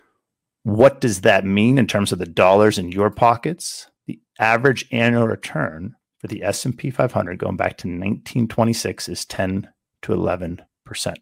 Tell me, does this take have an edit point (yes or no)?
yes